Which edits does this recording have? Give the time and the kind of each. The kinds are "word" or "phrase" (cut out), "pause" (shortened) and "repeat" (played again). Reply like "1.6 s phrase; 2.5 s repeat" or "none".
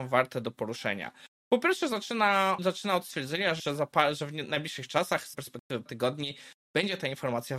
2.6 s word; 3.6 s word; 5.3 s word; 5.9 s word